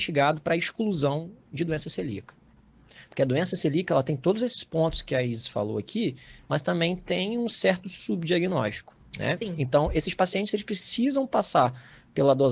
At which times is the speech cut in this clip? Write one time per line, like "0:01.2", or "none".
none